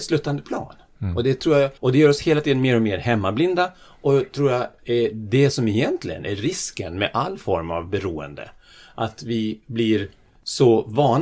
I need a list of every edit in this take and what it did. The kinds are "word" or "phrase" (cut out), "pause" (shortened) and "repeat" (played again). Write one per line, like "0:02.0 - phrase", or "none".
0:01.8 - pause